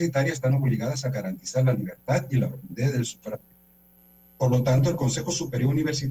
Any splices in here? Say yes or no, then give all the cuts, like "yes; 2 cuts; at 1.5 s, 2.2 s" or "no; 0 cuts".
no; 0 cuts